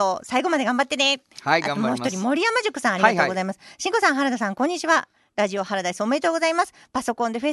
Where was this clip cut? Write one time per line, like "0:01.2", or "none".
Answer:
none